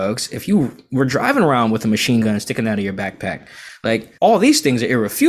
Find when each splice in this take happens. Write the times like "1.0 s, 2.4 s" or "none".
4.2 s